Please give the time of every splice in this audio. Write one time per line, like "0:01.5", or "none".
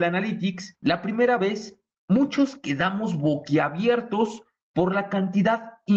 none